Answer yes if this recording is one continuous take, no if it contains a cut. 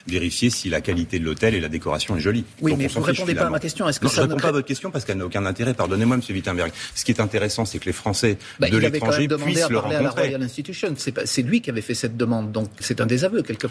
no